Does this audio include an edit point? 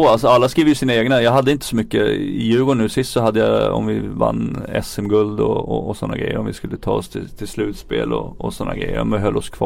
no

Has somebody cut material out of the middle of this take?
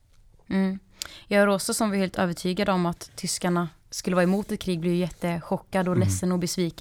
yes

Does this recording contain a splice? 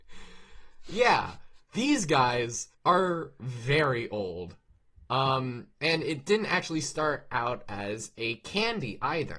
yes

